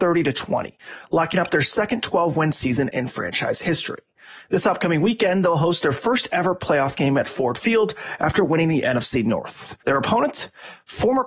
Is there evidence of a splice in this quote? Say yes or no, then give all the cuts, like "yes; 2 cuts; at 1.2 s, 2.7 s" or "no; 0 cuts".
yes; 1 cut; at 9.8 s